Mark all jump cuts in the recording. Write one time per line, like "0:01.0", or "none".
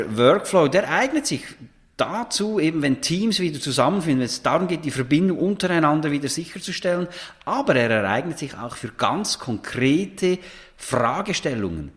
none